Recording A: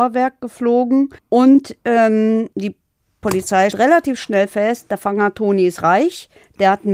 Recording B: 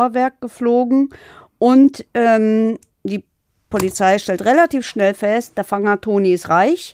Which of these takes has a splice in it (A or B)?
A